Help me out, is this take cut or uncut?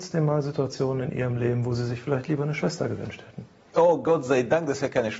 uncut